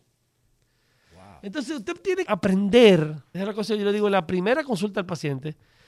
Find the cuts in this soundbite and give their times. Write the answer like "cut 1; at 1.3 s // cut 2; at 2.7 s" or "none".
cut 1; at 2.3 s // cut 2; at 3.3 s

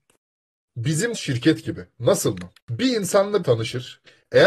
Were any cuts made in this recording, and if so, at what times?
cut 1; at 1.1 s // cut 2; at 2.6 s // cut 3; at 3.4 s

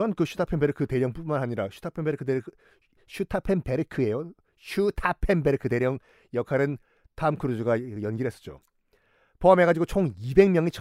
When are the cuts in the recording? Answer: none

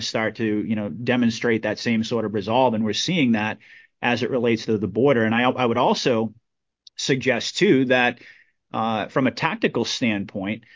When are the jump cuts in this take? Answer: none

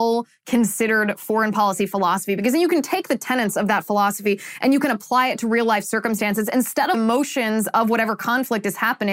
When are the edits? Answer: cut 1; at 6.9 s

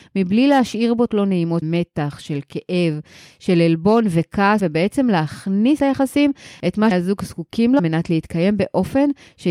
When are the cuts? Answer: cut 1; at 1.1 s // cut 2; at 1.6 s // cut 3; at 4.6 s // cut 4; at 5.8 s // cut 5; at 6.9 s // cut 6; at 7.8 s

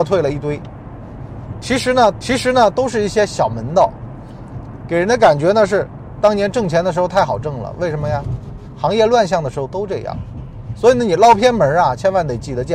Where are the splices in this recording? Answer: cut 1; at 2.1 s

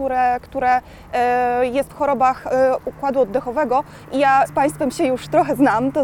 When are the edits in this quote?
cut 1; at 1.9 s // cut 2; at 4.5 s

